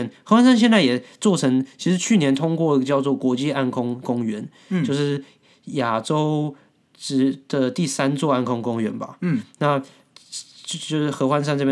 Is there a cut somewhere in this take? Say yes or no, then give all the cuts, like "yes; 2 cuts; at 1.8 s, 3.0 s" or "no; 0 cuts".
no; 0 cuts